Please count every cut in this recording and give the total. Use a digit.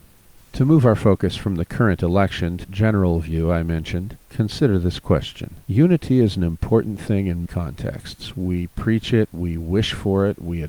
4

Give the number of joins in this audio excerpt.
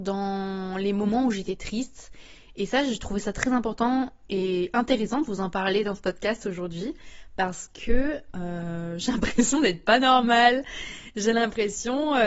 0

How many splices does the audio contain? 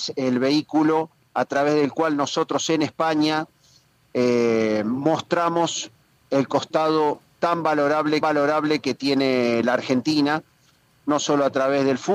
2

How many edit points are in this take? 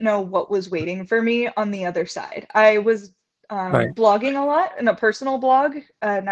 0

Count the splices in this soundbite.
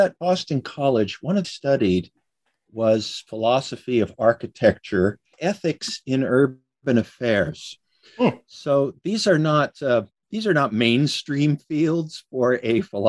2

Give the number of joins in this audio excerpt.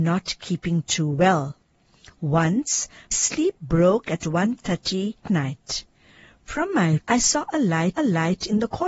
5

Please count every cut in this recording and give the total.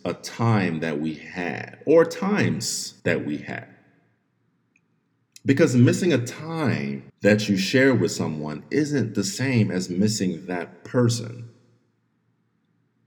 2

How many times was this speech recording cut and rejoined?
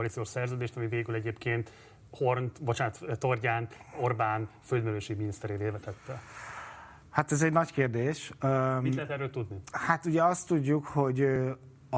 0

